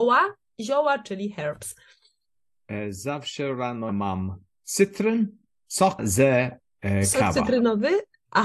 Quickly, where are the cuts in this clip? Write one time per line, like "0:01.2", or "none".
0:03.9
0:06.0